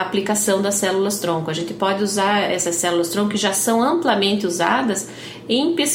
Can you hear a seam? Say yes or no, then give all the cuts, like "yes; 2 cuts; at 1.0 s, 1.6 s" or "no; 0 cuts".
no; 0 cuts